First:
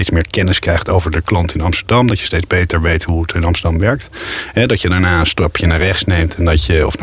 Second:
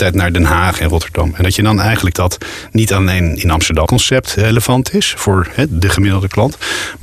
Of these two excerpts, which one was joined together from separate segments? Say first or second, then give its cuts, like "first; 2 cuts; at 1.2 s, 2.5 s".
second; 2 cuts; at 2.1 s, 3.9 s